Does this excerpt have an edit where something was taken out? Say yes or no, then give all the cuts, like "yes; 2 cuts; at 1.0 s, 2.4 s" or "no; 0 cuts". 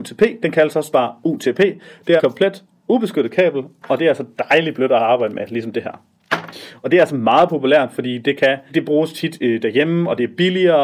yes; 3 cuts; at 0.9 s, 2.2 s, 8.7 s